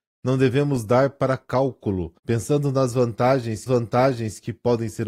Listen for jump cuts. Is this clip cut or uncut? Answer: cut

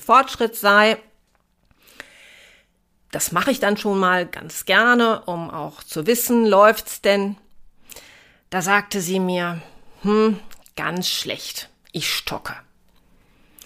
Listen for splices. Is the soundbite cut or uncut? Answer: uncut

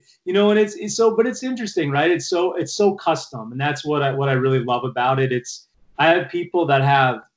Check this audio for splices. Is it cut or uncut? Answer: uncut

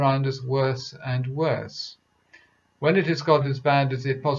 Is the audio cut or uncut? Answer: cut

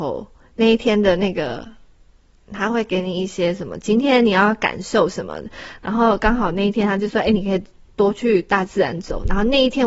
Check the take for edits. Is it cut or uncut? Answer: uncut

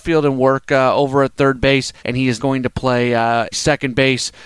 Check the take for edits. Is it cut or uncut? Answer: cut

